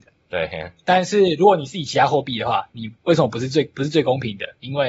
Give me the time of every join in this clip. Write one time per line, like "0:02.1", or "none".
0:03.0